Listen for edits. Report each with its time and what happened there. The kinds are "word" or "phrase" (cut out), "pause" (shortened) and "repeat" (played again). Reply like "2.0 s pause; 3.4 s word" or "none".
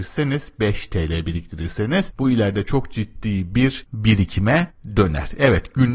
none